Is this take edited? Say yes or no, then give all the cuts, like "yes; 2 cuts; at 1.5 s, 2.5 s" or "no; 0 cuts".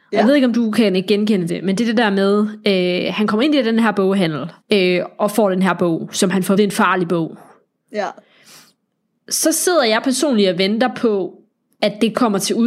yes; 3 cuts; at 1.5 s, 4.6 s, 6.6 s